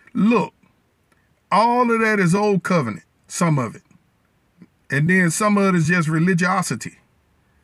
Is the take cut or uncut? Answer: uncut